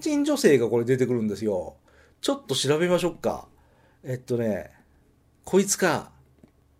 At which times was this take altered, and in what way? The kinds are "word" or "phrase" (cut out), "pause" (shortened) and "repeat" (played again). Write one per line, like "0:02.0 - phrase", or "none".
none